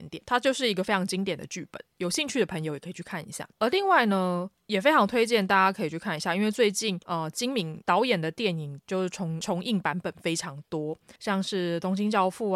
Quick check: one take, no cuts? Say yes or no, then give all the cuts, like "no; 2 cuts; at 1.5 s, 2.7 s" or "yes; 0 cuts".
no; 2 cuts; at 3.5 s, 11.2 s